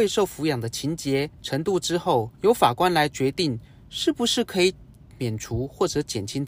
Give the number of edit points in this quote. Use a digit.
2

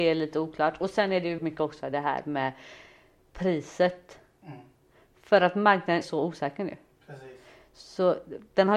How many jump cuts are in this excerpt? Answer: 2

